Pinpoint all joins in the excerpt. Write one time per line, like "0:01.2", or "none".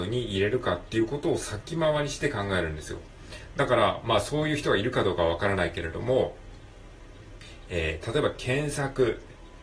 none